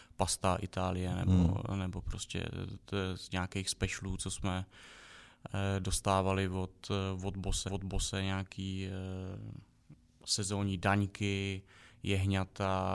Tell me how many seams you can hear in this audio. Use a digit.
1